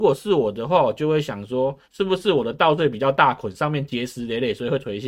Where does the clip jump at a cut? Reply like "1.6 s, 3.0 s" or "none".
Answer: 1.8 s